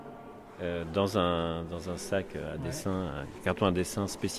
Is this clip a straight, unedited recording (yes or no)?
yes